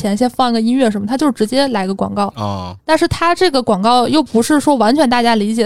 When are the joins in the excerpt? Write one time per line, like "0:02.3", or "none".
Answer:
0:02.8